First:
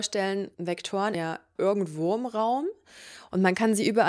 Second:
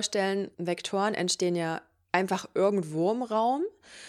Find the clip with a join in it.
first; 2 cuts; at 1.1 s, 1.6 s

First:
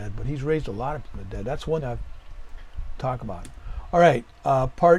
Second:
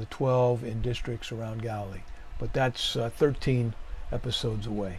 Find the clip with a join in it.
first; 3 cuts; at 1.0 s, 1.8 s, 3.0 s

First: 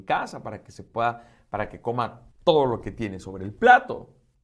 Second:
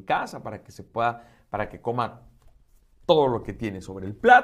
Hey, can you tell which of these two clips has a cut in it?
first; 1 cut; at 2.3 s

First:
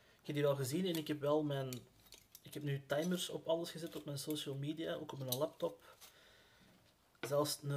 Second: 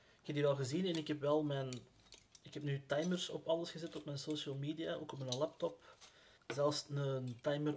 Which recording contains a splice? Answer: second; 1 cut; at 6.4 s

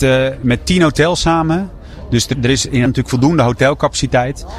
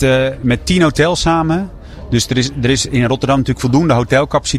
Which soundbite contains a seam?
first; 2 cuts; at 2.3 s, 2.9 s

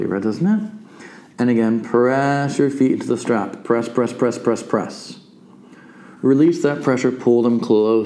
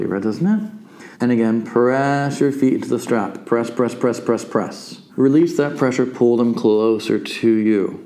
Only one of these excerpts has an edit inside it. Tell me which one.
second; 2 cuts; at 1.1 s, 5.1 s

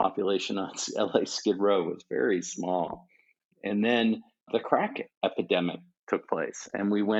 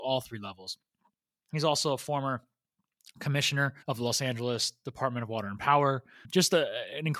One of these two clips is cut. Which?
second; 1 cut; at 3.8 s

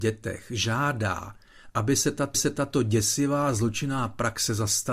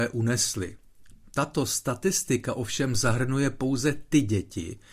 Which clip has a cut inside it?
first; 1 cut; at 2.3 s

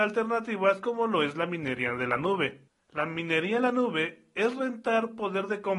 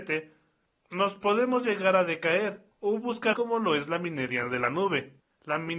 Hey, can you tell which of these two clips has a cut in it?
second; 2 cuts; at 2.7 s, 3.3 s

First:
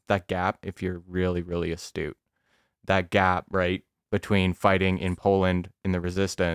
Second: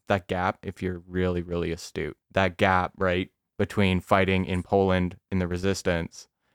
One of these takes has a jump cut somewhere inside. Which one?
second; 1 cut; at 2.2 s

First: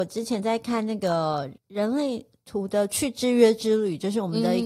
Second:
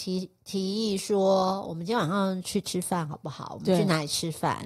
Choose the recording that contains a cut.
first; 1 cut; at 1.6 s

